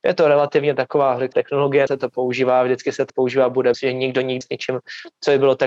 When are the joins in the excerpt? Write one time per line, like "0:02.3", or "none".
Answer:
0:01.3
0:01.9
0:03.1
0:03.7
0:04.4